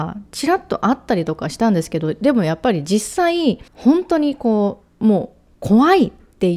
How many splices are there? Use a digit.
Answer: 2